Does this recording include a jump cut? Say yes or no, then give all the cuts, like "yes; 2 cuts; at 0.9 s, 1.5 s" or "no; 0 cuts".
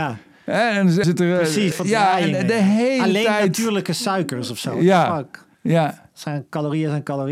yes; 3 cuts; at 1.0 s, 1.7 s, 5.5 s